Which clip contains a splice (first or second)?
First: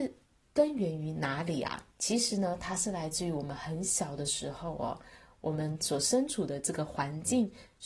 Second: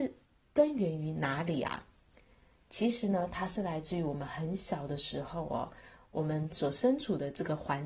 first